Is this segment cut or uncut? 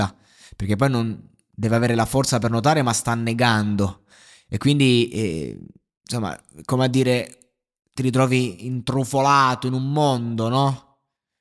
uncut